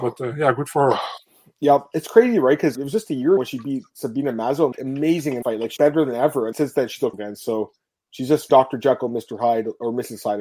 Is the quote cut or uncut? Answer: cut